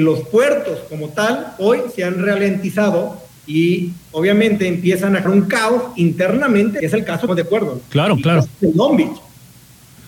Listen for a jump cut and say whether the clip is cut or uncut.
cut